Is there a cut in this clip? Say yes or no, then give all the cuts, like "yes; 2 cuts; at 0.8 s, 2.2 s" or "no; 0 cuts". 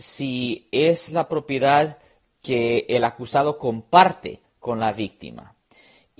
no; 0 cuts